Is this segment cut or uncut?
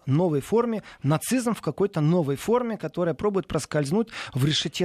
uncut